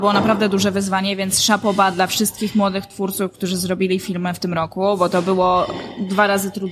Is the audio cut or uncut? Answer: uncut